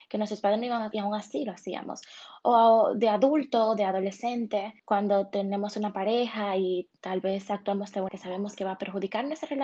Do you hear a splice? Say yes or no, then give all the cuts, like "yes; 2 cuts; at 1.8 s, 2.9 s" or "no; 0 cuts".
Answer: yes; 4 cuts; at 0.9 s, 4.8 s, 7.0 s, 8.1 s